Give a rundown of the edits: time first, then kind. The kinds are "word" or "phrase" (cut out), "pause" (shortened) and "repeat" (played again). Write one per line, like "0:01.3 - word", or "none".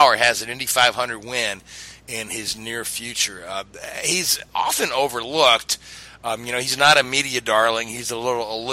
none

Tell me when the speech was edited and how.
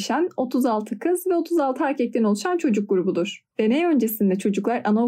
0:03.5 - pause

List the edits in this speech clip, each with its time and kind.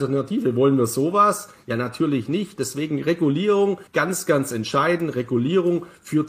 0:03.9 - pause

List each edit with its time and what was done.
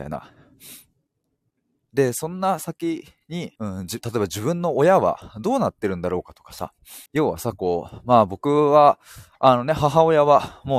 0:03.6 - pause
0:07.1 - pause

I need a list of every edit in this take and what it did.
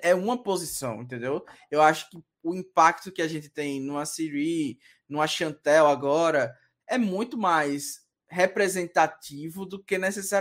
none

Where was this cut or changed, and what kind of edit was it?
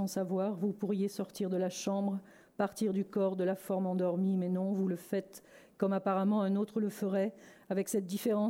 none

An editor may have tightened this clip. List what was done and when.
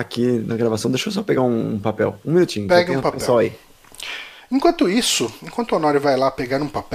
none

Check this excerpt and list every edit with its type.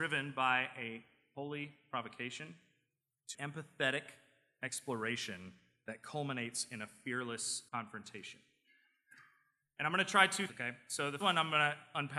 0:03.3 - word
0:07.7 - pause
0:10.5 - word
0:11.2 - word

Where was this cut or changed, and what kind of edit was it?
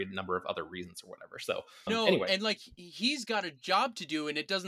0:01.9 - word

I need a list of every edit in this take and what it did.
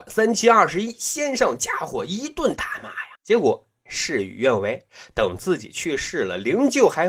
0:03.2 - pause

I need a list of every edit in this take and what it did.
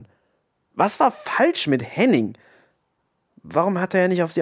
none

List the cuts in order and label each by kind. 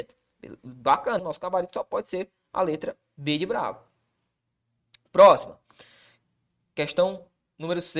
0:01.2 - word

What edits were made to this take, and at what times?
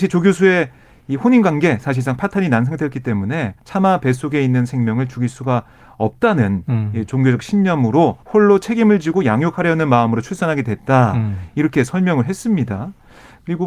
0:03.6 - pause
0:08.2 - pause

